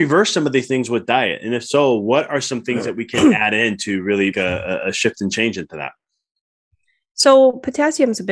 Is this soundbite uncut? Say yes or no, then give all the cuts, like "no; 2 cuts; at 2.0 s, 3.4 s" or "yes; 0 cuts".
no; 1 cut; at 4.3 s